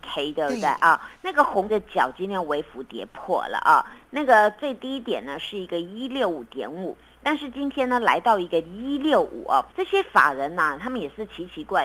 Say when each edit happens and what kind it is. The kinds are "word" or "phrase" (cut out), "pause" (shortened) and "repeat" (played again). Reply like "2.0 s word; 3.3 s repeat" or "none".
1.7 s word; 9.7 s pause